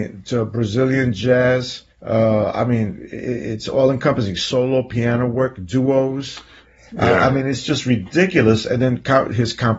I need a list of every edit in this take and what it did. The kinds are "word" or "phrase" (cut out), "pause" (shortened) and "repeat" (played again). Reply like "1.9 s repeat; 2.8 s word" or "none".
1.9 s pause